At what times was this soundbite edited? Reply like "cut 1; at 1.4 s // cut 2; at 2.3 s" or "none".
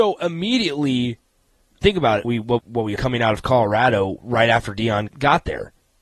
cut 1; at 1.8 s // cut 2; at 2.2 s // cut 3; at 2.6 s // cut 4; at 3.0 s // cut 5; at 5.1 s

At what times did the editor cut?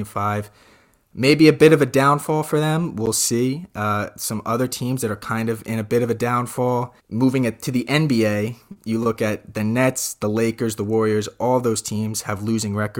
cut 1; at 7.0 s

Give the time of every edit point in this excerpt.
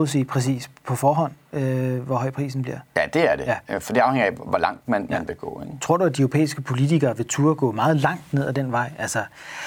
none

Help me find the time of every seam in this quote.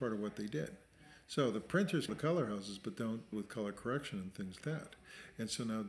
cut 1; at 2.1 s // cut 2; at 3.3 s // cut 3; at 4.6 s

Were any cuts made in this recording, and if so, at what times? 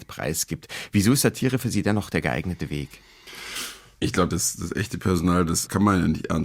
none

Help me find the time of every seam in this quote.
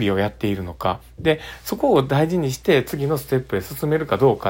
none

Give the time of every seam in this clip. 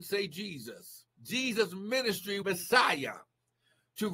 cut 1; at 1.1 s // cut 2; at 2.4 s

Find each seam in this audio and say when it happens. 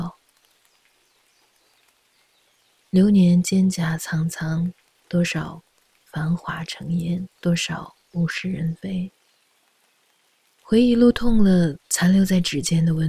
cut 1; at 7.3 s // cut 2; at 11.8 s

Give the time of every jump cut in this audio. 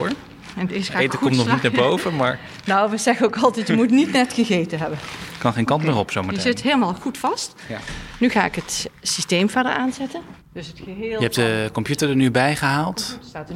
cut 1; at 10.4 s

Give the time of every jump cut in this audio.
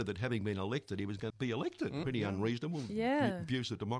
cut 1; at 1.3 s // cut 2; at 2.0 s

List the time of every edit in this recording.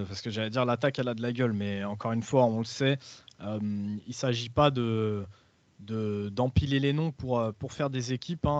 none

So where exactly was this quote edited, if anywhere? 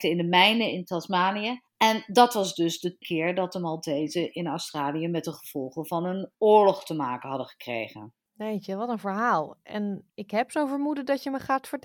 cut 1; at 1.7 s // cut 2; at 3.0 s // cut 3; at 6.3 s // cut 4; at 8.3 s // cut 5; at 10.1 s

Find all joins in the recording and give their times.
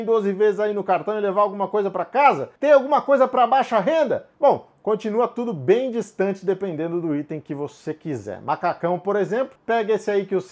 cut 1; at 4.3 s

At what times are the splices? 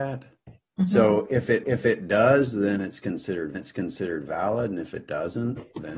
cut 1; at 1.6 s // cut 2; at 3.5 s

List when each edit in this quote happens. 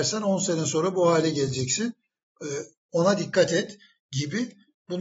none

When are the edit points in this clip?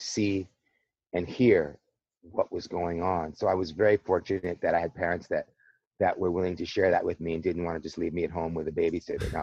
none

